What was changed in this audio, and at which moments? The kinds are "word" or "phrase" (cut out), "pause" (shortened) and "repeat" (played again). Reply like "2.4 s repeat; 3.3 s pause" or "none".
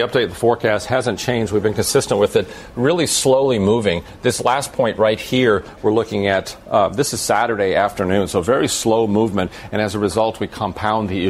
none